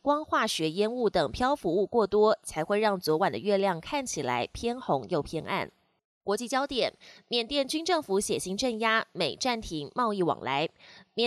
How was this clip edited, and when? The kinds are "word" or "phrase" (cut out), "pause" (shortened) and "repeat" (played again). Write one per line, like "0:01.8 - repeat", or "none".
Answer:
0:06.0 - pause